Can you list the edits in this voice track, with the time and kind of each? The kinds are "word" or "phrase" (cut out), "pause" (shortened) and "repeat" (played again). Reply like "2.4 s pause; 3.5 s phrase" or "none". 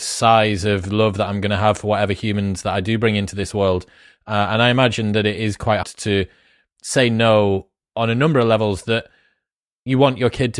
5.8 s word